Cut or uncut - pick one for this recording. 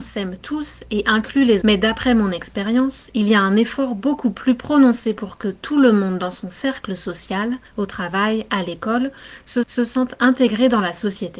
cut